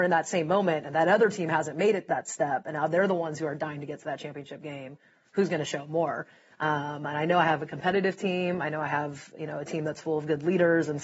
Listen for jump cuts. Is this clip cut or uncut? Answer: uncut